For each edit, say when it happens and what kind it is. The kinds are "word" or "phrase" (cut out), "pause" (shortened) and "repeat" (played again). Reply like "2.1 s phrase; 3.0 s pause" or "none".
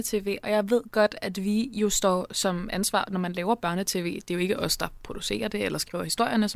none